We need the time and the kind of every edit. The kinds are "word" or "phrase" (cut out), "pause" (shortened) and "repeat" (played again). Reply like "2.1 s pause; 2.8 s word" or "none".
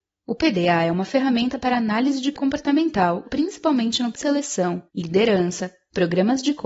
2.3 s word; 3.2 s word; 4.1 s word; 4.9 s pause